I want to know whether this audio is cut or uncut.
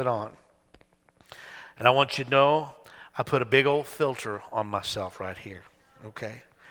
uncut